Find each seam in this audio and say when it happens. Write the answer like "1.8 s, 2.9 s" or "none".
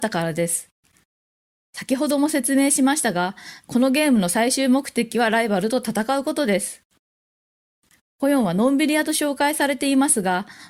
none